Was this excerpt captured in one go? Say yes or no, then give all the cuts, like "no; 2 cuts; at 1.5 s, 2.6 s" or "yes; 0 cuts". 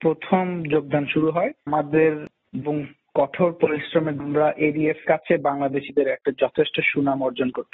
no; 4 cuts; at 1.7 s, 2.6 s, 4.2 s, 5.0 s